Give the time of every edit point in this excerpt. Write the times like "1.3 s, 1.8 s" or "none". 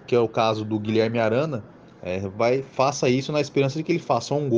none